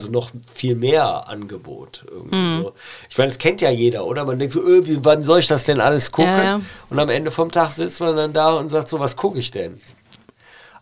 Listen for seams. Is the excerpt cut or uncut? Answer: uncut